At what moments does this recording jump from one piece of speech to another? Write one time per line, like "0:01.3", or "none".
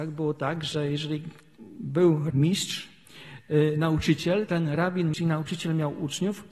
0:02.3
0:04.5
0:05.1